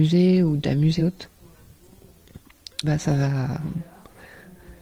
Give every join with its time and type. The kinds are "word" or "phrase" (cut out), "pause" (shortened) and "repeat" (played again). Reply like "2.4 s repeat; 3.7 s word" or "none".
1.0 s word; 2.8 s word